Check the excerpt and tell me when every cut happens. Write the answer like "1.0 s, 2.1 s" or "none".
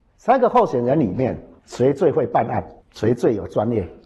1.6 s, 2.8 s